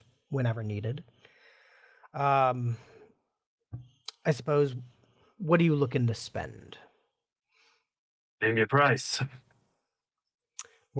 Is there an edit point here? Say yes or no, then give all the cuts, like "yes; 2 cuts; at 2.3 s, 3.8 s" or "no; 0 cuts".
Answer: no; 0 cuts